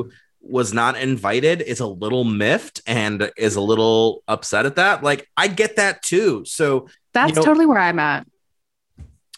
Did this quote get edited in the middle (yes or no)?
yes